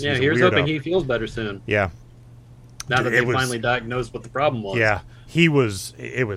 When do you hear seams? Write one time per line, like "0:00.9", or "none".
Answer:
none